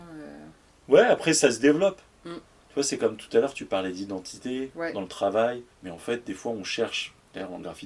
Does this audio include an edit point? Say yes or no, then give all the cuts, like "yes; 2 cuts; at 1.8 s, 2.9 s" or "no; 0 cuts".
yes; 1 cut; at 5.7 s